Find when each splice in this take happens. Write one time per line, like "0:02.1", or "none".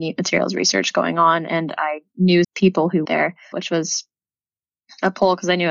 0:02.4
0:03.0
0:03.5